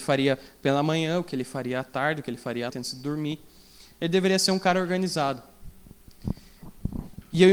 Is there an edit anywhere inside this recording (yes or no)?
yes